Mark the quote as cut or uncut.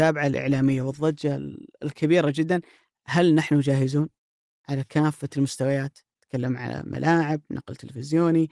uncut